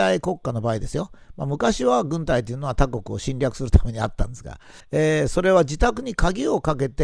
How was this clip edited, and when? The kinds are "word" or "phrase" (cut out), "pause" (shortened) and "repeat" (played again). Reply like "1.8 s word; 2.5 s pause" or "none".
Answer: 4.8 s pause